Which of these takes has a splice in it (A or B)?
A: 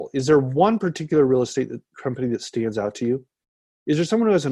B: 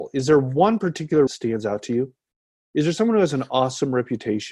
B